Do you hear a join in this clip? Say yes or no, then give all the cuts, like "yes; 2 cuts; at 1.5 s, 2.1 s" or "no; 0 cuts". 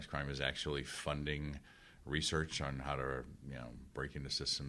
no; 0 cuts